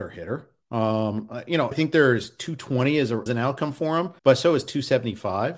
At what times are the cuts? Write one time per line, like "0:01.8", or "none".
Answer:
0:01.7
0:03.3
0:04.2